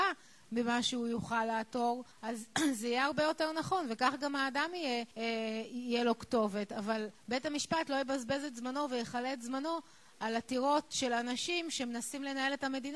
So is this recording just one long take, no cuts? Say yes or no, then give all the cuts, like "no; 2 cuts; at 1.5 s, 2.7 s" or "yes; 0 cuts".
no; 3 cuts; at 2.1 s, 5.1 s, 7.2 s